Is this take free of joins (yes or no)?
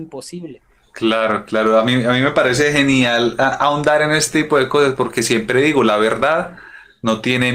yes